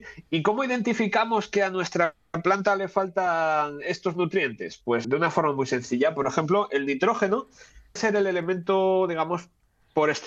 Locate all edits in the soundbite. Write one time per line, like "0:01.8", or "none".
0:05.0
0:08.0